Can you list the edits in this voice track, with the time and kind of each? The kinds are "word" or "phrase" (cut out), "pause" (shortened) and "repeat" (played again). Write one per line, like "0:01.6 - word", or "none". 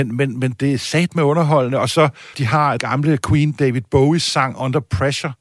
0:02.3 - phrase
0:02.8 - word

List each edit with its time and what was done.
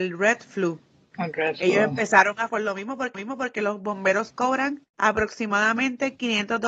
0:02.5 - word
0:03.1 - repeat
0:04.9 - pause

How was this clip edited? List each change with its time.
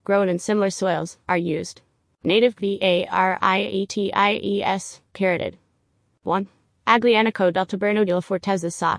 0:02.5 - word
0:08.1 - word

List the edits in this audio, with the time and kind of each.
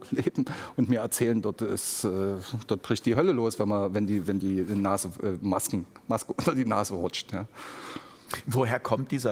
none

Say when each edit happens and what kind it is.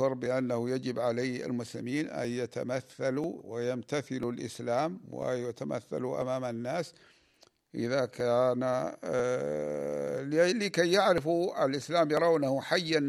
none

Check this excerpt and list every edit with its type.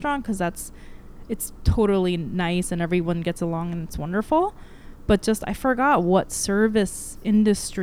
none

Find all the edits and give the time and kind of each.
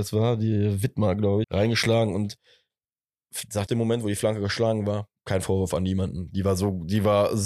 0:01.4 - phrase
0:03.7 - phrase

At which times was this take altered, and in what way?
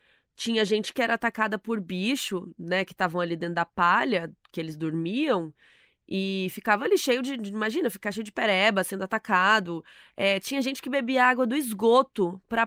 none

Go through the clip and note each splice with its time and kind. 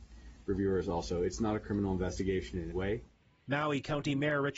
0:02.7 - word

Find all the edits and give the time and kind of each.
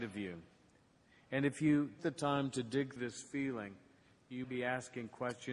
0:02.0 - word
0:03.0 - word
0:04.4 - word

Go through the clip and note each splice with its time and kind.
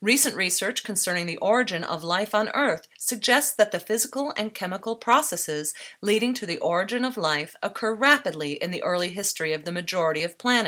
none

